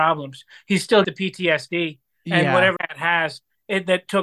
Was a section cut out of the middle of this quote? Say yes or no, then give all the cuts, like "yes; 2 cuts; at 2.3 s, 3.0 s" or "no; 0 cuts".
yes; 2 cuts; at 1.0 s, 2.8 s